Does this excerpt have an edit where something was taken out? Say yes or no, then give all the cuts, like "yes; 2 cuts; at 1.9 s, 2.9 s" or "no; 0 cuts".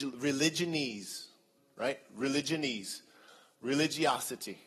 no; 0 cuts